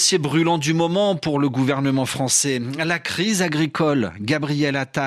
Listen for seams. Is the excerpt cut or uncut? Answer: uncut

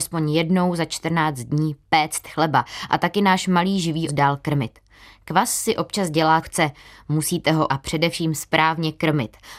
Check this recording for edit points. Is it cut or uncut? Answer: cut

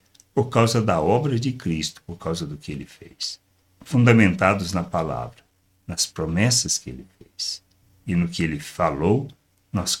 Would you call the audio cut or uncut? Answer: uncut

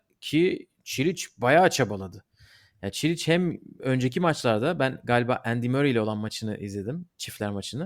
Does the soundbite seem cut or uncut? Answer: uncut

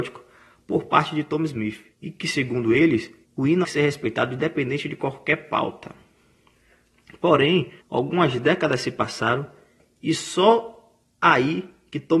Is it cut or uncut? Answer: cut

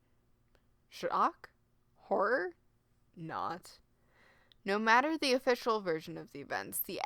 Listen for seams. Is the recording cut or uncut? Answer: uncut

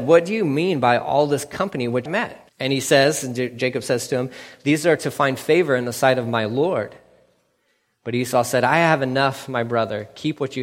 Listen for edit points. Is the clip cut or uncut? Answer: cut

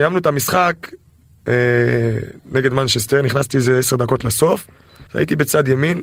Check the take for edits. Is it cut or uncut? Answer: cut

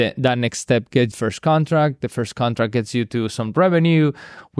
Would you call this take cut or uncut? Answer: cut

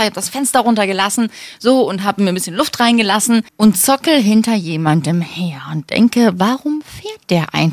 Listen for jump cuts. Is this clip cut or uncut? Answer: cut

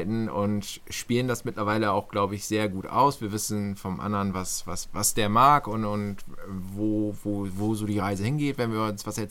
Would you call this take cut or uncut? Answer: uncut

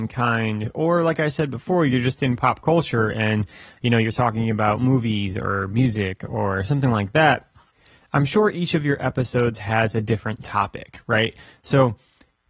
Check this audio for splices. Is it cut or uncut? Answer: uncut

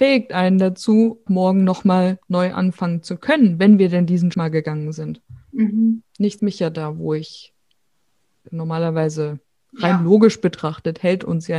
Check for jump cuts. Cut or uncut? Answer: cut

